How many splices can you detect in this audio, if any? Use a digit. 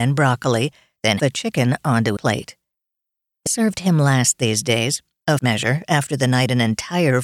4